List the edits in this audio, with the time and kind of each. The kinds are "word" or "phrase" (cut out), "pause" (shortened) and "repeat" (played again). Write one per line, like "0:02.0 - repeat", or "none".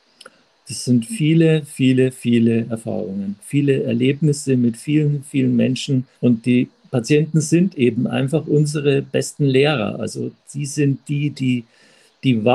0:06.2 - pause